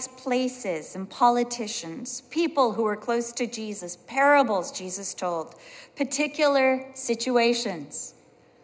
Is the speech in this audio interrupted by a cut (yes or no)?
no